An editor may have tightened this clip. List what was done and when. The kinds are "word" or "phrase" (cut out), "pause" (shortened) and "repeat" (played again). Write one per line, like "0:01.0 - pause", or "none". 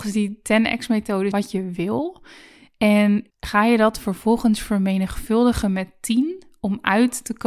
0:01.3 - phrase
0:03.3 - pause